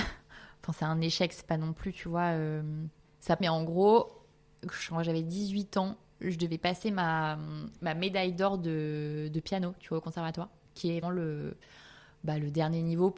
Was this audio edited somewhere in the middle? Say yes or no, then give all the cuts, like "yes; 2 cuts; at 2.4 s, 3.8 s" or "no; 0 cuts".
yes; 3 cuts; at 3.0 s, 3.4 s, 11.0 s